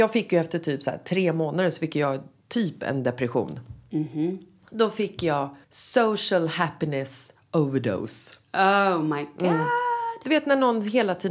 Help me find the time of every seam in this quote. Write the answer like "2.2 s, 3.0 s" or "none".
5.6 s